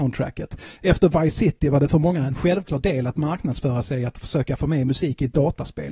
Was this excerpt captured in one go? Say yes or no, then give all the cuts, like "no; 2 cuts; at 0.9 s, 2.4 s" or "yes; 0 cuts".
yes; 0 cuts